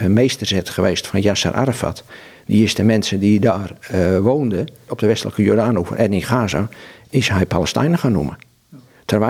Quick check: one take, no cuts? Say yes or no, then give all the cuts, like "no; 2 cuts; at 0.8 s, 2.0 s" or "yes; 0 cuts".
yes; 0 cuts